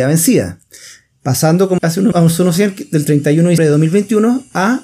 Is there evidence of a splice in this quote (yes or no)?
yes